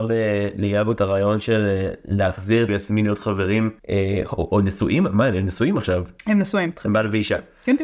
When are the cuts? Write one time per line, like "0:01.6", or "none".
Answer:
0:02.7
0:03.8